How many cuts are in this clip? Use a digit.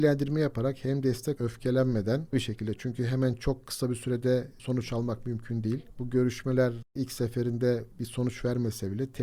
2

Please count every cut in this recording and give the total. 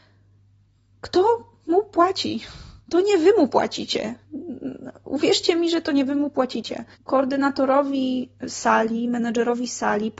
2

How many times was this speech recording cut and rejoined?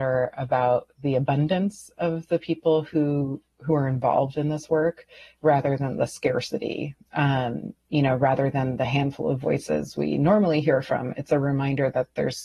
0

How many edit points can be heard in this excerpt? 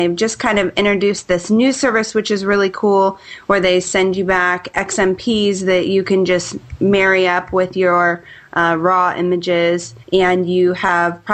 1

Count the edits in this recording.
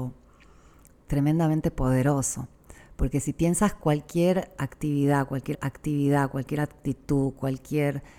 1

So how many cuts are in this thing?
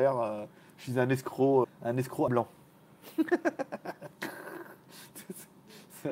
2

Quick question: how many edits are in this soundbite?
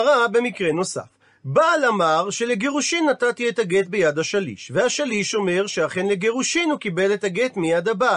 0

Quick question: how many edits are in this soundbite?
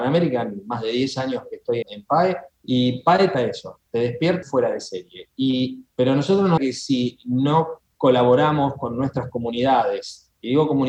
6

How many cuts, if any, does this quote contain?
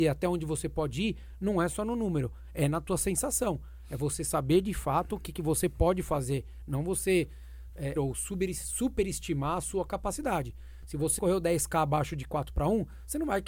2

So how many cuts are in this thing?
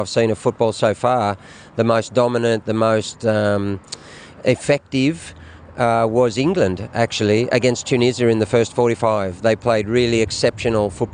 0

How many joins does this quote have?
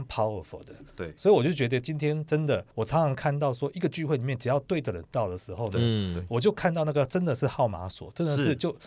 1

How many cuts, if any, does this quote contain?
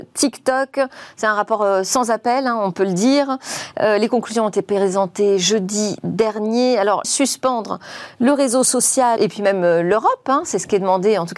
2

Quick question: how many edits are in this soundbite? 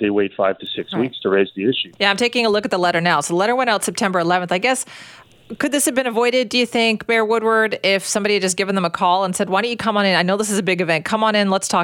1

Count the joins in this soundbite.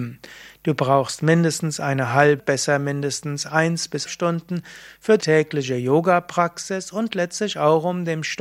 3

